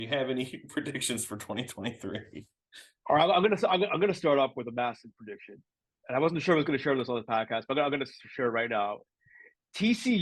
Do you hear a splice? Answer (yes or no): no